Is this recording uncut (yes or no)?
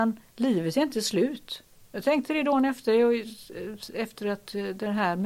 yes